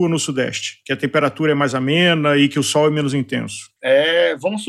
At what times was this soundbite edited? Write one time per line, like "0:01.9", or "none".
none